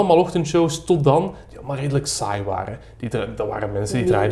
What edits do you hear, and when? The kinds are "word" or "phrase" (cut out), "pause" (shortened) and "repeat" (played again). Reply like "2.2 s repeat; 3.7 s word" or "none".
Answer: none